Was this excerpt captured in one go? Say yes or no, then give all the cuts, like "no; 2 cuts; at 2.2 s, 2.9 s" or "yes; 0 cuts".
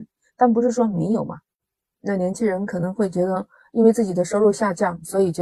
yes; 0 cuts